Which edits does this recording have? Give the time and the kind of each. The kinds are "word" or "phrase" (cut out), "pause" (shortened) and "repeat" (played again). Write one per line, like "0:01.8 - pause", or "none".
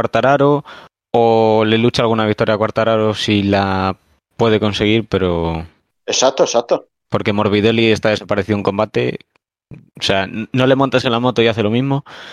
none